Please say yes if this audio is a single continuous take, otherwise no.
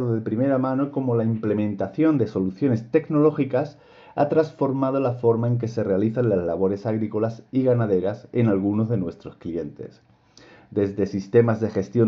yes